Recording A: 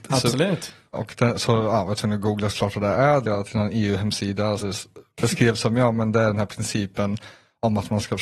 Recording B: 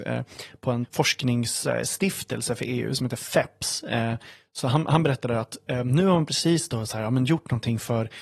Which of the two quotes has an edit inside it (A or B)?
A